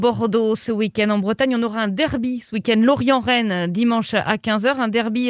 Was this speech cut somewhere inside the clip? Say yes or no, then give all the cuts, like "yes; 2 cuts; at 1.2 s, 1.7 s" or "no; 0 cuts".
no; 0 cuts